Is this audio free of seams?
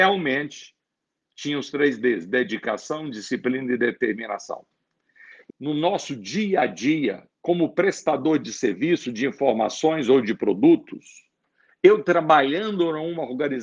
no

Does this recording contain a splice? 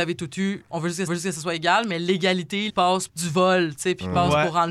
yes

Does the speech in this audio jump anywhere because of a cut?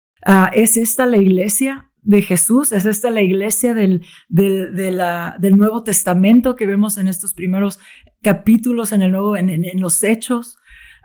no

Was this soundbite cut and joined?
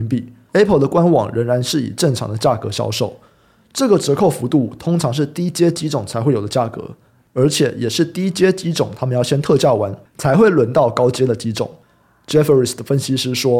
no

